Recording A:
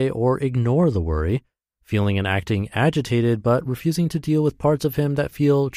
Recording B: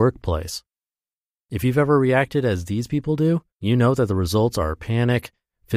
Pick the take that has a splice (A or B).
B